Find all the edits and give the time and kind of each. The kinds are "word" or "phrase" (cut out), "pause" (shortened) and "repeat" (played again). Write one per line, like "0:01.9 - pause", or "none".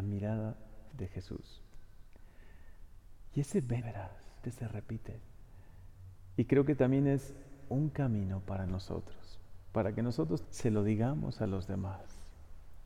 0:00.9 - word
0:03.8 - word
0:04.4 - word
0:10.4 - word